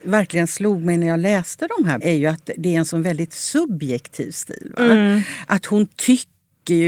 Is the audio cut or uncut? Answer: cut